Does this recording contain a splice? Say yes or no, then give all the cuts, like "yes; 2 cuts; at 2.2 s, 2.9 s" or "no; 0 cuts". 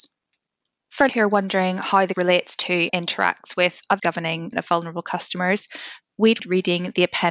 yes; 6 cuts; at 1.1 s, 2.1 s, 2.9 s, 4.0 s, 4.5 s, 6.4 s